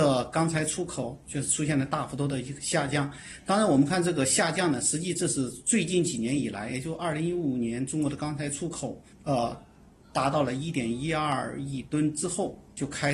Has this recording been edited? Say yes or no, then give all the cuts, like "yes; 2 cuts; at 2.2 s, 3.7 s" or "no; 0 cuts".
yes; 1 cut; at 9.1 s